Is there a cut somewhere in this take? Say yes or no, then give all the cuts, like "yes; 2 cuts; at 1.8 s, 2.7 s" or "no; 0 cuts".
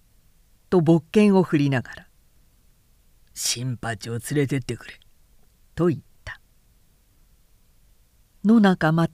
no; 0 cuts